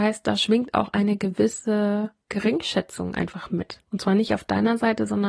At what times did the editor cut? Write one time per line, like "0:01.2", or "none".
0:02.2
0:03.8